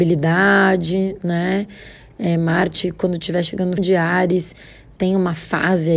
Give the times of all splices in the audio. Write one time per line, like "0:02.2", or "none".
0:03.8